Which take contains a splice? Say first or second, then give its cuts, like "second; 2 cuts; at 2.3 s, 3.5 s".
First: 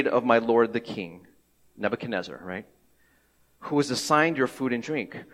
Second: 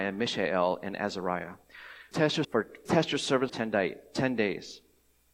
second; 4 cuts; at 2.1 s, 2.4 s, 2.9 s, 3.5 s